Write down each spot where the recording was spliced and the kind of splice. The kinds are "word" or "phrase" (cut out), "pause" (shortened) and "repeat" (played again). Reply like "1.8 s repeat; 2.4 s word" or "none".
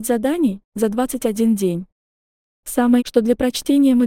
3.0 s word